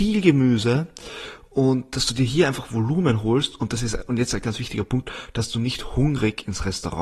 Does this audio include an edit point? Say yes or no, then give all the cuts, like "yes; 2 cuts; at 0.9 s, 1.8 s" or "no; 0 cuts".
yes; 1 cut; at 4.4 s